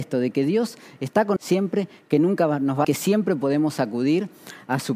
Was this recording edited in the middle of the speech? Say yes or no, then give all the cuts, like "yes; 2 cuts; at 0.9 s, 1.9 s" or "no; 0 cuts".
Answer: yes; 2 cuts; at 1.4 s, 2.8 s